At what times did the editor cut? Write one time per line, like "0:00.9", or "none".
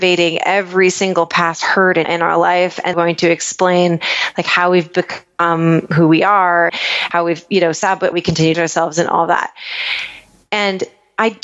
0:02.0
0:02.9
0:06.7
0:08.1
0:08.5